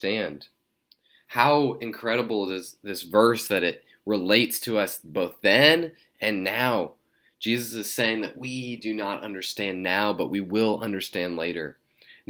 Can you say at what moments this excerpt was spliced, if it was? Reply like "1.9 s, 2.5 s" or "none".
none